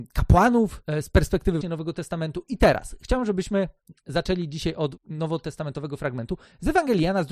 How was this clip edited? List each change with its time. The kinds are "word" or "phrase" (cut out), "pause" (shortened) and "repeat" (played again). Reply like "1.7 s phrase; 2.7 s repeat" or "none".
1.6 s word; 5.0 s word